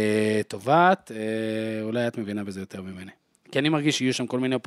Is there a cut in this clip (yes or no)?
no